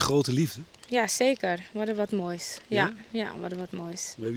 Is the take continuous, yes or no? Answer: yes